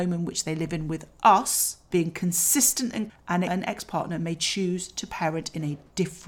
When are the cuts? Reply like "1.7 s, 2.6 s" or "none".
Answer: 1.9 s, 3.1 s, 3.5 s